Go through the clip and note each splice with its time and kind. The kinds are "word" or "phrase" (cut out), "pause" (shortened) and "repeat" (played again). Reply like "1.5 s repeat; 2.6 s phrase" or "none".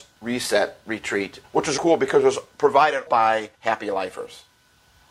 1.4 s word; 1.8 s word; 3.1 s word; 3.5 s pause